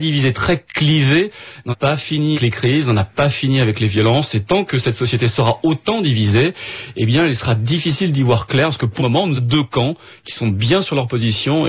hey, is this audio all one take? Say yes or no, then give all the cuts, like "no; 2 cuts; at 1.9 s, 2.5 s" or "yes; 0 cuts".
no; 4 cuts; at 1.7 s, 2.3 s, 9.0 s, 9.4 s